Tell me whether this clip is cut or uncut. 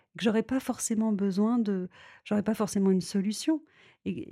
uncut